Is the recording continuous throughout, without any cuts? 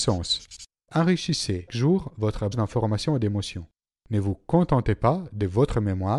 no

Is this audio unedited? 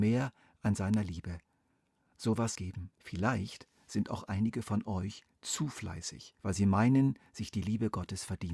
no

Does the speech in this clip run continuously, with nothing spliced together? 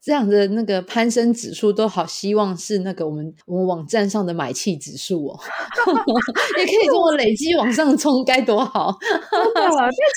no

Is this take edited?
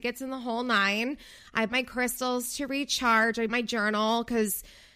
yes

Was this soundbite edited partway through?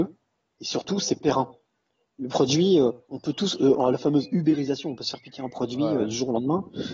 yes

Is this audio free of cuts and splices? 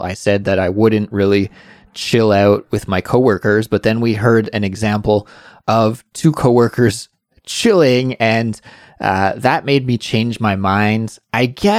yes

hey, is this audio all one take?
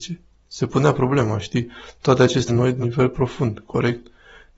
no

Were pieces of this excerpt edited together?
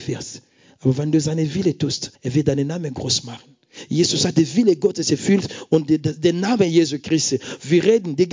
yes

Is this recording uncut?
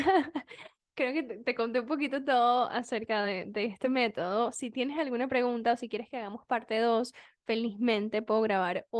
yes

